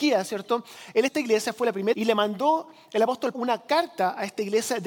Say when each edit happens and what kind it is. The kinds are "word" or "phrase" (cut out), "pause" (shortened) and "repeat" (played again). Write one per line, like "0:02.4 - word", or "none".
0:01.1 - word
0:01.9 - word
0:03.3 - word